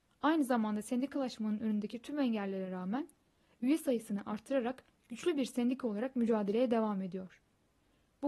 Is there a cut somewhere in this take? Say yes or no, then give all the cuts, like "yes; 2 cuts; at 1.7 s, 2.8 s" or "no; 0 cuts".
no; 0 cuts